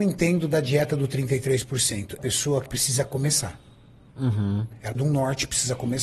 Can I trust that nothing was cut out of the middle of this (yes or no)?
no